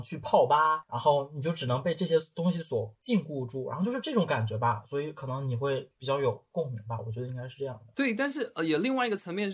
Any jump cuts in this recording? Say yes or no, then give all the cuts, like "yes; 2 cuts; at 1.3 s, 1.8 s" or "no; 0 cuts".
yes; 1 cut; at 7.9 s